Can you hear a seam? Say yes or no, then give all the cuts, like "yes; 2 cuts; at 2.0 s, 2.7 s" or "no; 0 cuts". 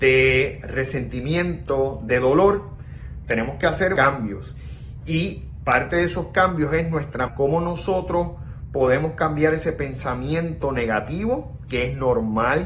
yes; 3 cuts; at 3.2 s, 4.0 s, 7.3 s